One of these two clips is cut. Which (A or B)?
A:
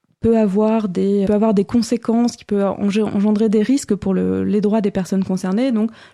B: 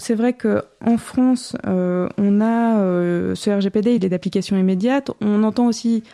A